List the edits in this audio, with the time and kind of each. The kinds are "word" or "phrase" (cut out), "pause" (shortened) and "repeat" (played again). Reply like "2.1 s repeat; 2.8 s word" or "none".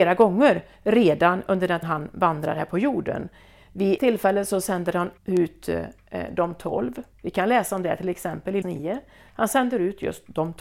1.8 s word; 4.0 s word; 5.2 s pause; 7.1 s pause; 8.6 s word